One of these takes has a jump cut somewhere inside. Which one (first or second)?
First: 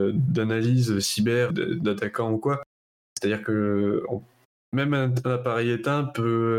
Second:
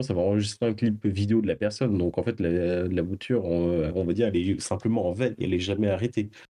first